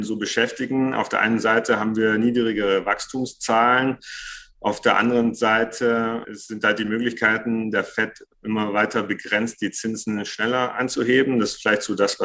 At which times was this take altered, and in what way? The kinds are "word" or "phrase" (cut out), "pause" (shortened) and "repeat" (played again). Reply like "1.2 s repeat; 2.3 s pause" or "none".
6.2 s word

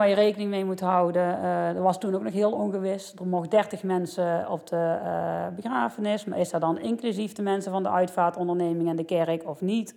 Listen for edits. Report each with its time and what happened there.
none

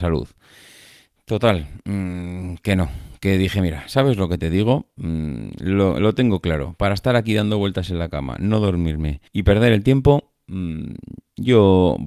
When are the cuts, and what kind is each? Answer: 9.3 s pause

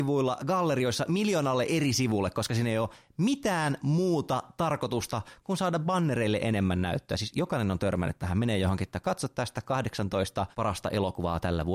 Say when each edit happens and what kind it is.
10.5 s pause

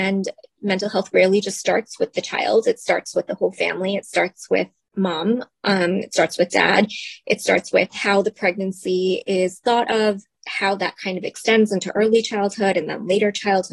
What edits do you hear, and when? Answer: none

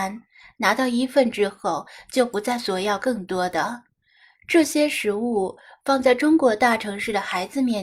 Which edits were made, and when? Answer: none

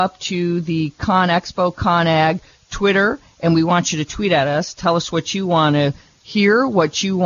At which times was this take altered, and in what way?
none

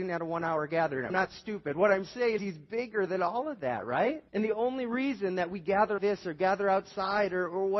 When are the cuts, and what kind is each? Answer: 1.1 s word; 2.4 s word; 4.3 s pause; 6.0 s word

